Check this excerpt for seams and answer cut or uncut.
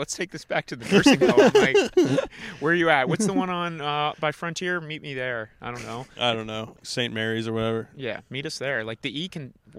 uncut